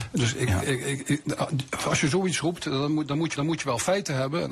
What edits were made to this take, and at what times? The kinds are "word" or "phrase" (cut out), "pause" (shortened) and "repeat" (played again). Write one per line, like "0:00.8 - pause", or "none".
0:01.2 - word
0:03.4 - repeat